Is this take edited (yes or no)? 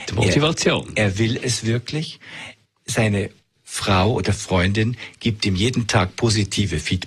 no